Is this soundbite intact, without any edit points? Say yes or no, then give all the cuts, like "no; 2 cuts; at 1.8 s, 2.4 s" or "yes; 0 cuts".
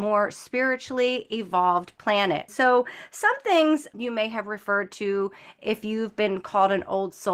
no; 2 cuts; at 2.5 s, 3.9 s